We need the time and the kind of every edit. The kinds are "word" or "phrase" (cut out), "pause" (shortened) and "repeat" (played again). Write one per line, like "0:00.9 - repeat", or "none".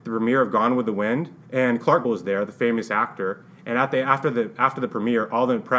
0:01.4 - pause
0:02.0 - word